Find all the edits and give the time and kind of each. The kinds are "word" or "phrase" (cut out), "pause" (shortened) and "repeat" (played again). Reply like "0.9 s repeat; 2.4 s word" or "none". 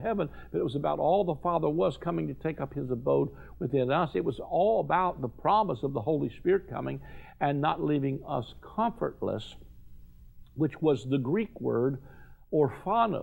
none